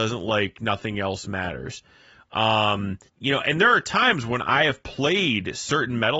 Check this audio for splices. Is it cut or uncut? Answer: cut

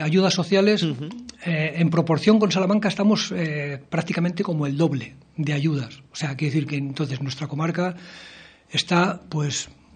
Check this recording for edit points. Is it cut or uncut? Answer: uncut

